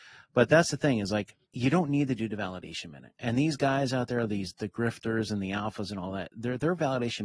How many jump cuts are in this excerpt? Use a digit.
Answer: 2